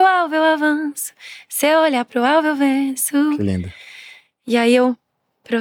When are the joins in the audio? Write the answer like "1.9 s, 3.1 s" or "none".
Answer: none